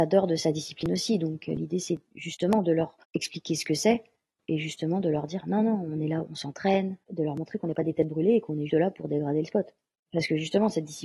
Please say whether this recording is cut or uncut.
cut